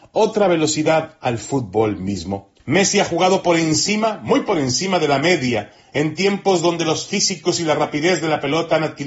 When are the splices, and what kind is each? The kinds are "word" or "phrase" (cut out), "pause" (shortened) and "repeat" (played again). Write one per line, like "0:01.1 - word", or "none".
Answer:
0:02.6 - pause